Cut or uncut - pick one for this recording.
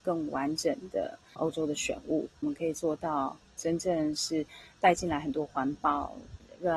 uncut